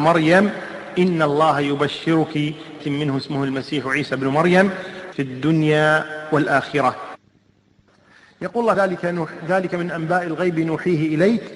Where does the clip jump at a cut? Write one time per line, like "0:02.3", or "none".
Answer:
0:02.8
0:05.1
0:08.7